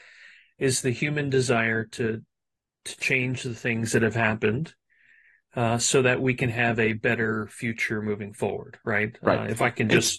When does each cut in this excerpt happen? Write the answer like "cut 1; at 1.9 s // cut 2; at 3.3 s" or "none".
none